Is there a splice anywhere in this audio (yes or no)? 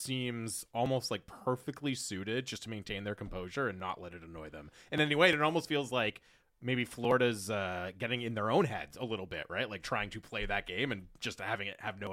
no